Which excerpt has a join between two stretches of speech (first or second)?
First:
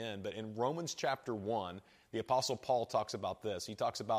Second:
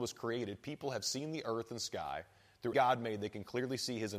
second